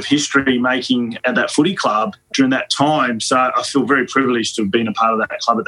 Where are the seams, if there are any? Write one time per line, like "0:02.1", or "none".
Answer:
none